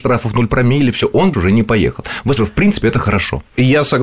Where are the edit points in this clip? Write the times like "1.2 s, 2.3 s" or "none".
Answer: 1.3 s, 2.4 s